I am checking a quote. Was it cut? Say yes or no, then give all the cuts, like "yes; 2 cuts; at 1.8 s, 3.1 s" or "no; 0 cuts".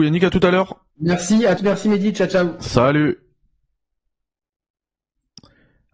yes; 2 cuts; at 0.9 s, 1.6 s